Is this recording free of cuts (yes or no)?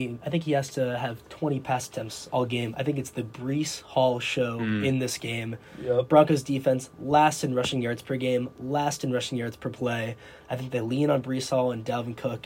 yes